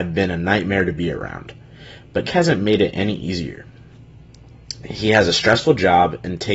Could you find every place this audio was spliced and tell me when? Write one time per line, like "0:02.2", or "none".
0:02.2

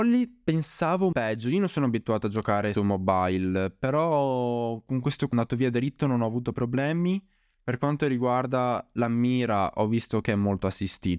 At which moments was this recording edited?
0:01.1
0:02.7
0:05.3
0:06.5

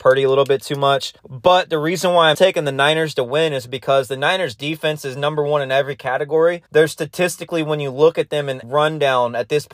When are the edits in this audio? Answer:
0:01.2
0:02.3
0:06.7
0:08.6

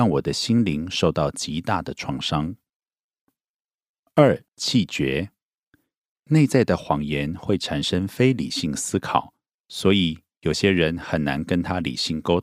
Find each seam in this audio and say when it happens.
0:04.5

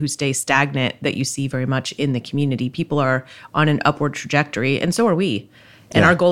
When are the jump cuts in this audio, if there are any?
none

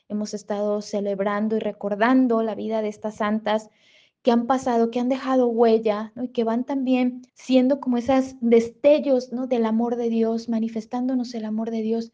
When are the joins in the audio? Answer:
0:07.3

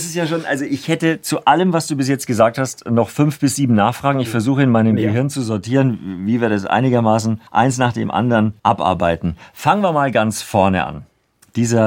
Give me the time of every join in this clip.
0:07.5
0:08.6

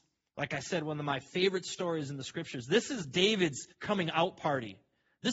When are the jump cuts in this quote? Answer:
0:03.7

